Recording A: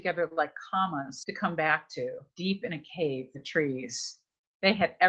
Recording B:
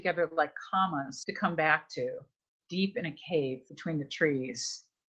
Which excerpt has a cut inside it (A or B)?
A